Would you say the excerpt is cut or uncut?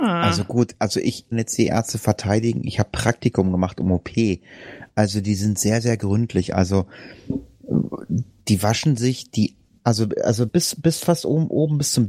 cut